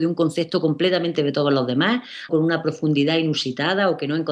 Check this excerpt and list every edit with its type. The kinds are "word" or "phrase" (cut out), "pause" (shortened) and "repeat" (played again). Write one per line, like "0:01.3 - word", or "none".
0:01.1 - word
0:02.3 - word